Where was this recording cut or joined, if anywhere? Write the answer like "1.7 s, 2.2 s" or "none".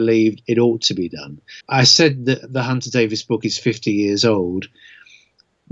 1.6 s